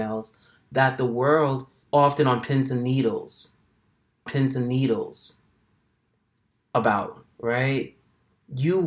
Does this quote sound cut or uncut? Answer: cut